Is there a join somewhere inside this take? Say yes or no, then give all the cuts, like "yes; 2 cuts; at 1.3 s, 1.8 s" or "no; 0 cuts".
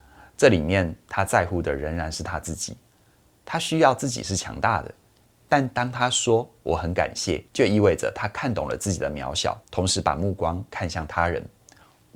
yes; 2 cuts; at 7.5 s, 9.6 s